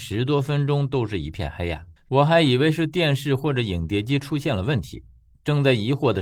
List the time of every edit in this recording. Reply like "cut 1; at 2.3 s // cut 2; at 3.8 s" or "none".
cut 1; at 2.0 s